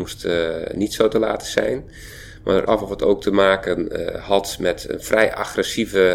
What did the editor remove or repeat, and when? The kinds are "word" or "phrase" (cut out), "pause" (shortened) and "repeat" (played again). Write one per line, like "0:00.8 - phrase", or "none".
0:02.7 - phrase